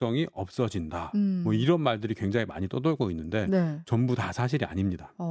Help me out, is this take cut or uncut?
uncut